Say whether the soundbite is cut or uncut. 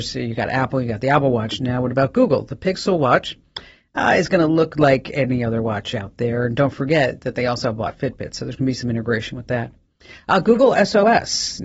uncut